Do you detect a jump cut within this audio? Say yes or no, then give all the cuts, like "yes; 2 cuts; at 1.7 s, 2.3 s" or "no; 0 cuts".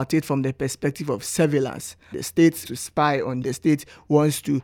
yes; 3 cuts; at 2.1 s, 2.6 s, 3.4 s